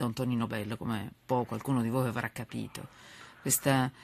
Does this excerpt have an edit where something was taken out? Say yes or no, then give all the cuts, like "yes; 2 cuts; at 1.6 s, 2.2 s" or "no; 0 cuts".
yes; 1 cut; at 1.1 s